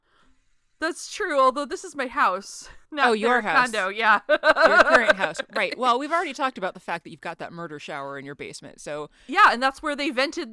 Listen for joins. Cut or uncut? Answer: cut